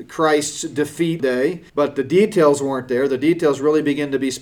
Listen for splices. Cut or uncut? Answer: cut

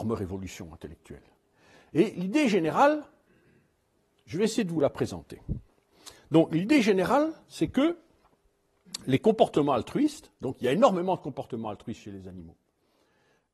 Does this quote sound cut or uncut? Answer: uncut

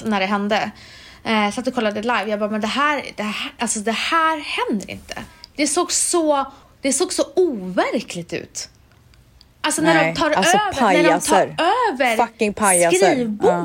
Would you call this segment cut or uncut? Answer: cut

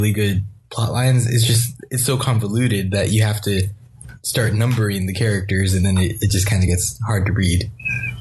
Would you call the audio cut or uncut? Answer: uncut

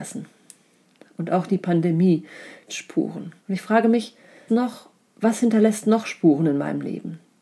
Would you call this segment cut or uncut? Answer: cut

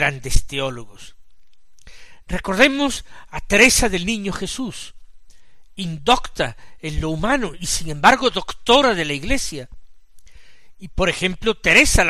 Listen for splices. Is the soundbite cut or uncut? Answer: uncut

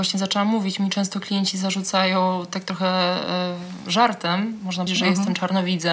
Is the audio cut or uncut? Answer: cut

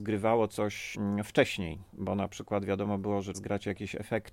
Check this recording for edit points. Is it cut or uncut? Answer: cut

